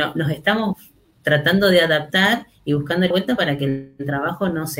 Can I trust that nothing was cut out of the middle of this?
no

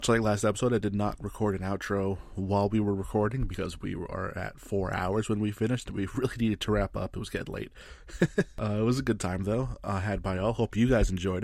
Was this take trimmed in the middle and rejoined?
no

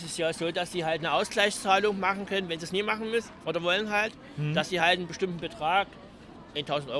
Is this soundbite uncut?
yes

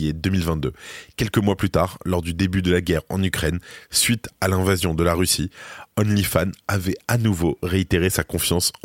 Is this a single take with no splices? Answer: yes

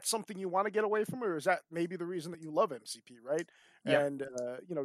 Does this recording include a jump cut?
no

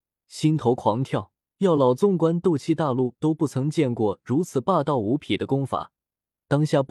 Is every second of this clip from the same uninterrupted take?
no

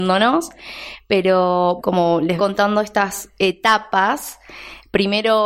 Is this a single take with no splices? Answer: no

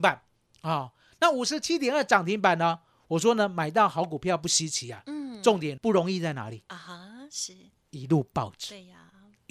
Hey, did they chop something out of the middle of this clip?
yes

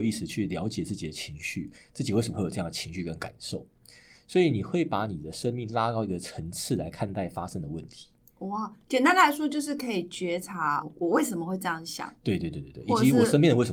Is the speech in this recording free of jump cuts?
no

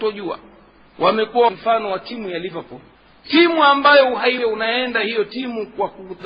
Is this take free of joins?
no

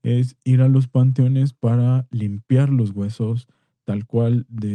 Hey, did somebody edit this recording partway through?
no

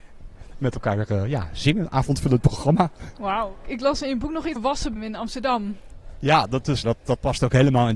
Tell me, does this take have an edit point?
yes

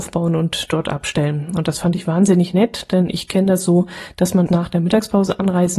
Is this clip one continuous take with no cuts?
no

